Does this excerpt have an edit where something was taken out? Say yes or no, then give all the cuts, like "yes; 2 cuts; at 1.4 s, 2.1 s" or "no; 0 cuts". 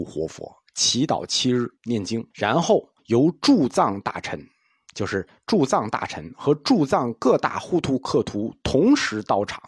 yes; 3 cuts; at 1.8 s, 2.3 s, 3.0 s